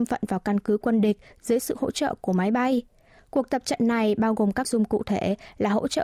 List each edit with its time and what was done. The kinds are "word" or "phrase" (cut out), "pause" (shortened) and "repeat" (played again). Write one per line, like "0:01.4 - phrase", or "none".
0:04.6 - word